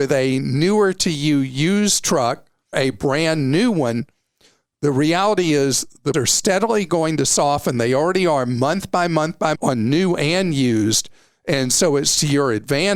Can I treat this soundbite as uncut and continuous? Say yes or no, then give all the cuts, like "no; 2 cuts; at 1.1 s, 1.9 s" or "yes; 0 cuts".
no; 3 cuts; at 2.7 s, 6.1 s, 9.5 s